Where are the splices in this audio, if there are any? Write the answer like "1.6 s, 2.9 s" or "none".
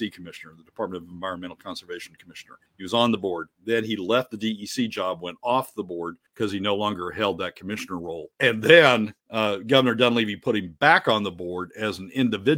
2.7 s, 6.3 s, 8.3 s, 9.2 s

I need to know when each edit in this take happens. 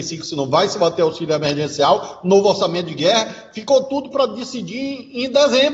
none

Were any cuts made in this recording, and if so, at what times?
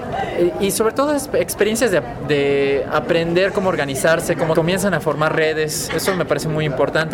4.5 s

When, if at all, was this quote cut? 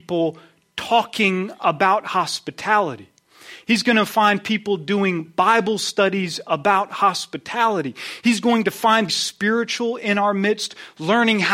9.1 s

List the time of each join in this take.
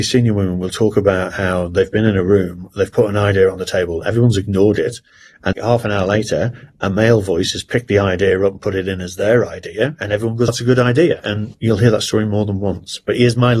5.5 s, 10.5 s

